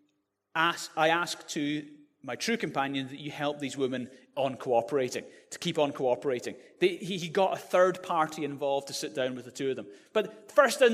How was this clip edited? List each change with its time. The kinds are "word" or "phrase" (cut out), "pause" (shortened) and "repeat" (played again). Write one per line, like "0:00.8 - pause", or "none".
none